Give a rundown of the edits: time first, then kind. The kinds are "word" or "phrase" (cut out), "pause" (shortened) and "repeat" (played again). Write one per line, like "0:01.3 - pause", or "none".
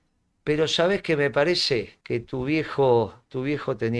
0:02.0 - pause